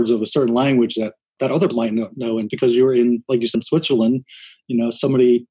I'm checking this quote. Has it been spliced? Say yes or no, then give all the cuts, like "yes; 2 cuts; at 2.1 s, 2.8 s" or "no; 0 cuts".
yes; 3 cuts; at 1.7 s, 2.5 s, 3.5 s